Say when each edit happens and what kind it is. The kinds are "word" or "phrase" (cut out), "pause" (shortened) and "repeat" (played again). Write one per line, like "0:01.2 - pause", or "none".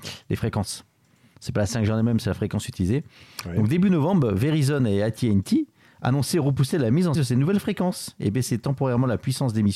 0:07.1 - word

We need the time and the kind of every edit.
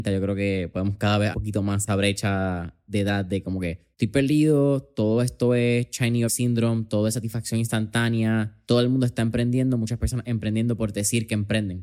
0:01.3 - phrase
0:01.9 - word
0:03.9 - pause
0:06.3 - word
0:08.6 - pause

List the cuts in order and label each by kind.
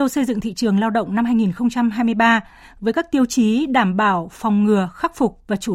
none

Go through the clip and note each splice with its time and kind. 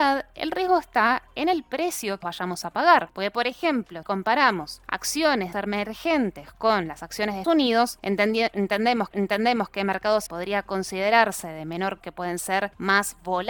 0:02.2 - word
0:04.0 - word
0:05.5 - phrase
0:07.4 - word
0:09.1 - repeat
0:10.3 - word
0:12.0 - phrase

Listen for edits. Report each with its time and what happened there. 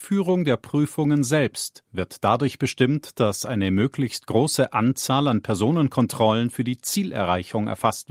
none

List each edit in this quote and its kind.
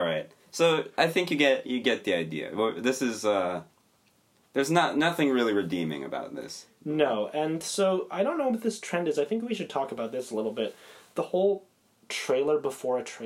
none

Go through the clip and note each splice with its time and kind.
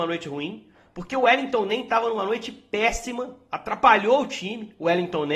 none

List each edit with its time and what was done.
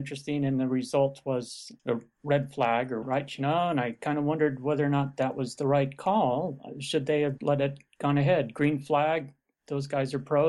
0:01.8 - word
0:03.0 - word
0:07.4 - word

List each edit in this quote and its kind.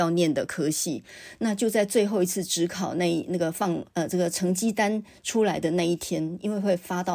0:03.9 - pause

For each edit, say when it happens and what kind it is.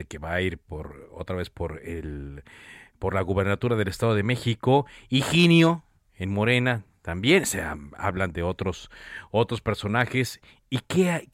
none

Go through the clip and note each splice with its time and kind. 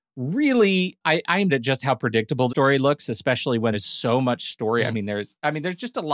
0:01.0 - word
0:01.5 - word
0:02.5 - word
0:03.7 - word

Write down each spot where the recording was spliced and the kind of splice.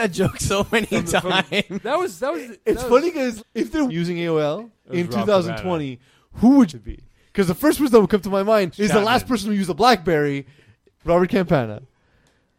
0:03.4 - word
0:03.9 - phrase
0:04.8 - pause
0:06.7 - phrase
0:08.7 - word
0:11.0 - word

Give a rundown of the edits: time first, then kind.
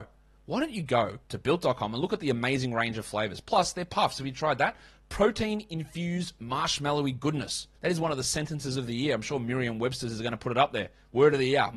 0:01.2 - pause
0:07.7 - pause

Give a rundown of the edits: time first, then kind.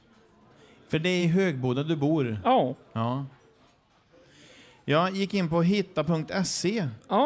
none

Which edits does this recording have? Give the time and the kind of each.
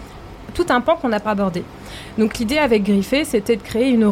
0:01.2 - word

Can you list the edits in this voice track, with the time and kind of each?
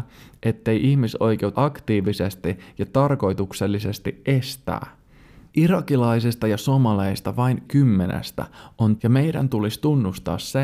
0:01.5 - word
0:07.7 - word
0:09.0 - word

